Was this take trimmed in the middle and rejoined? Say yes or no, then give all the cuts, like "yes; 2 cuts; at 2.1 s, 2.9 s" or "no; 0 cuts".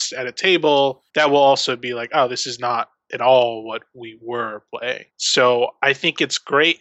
yes; 2 cuts; at 1.1 s, 5.1 s